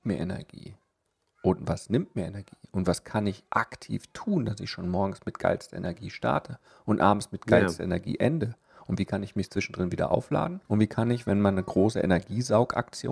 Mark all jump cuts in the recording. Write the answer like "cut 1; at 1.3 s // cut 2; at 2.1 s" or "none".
cut 1; at 10.7 s